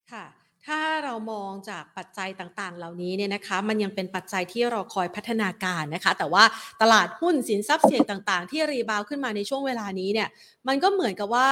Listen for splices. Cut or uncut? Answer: uncut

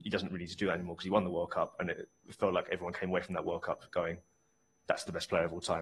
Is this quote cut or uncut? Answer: uncut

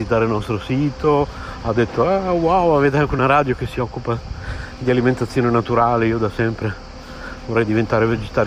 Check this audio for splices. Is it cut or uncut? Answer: uncut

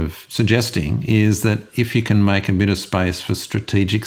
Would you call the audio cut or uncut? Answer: uncut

